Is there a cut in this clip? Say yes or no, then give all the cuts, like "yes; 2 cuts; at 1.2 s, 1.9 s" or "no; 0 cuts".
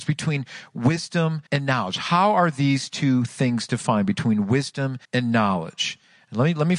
yes; 2 cuts; at 1.5 s, 5.0 s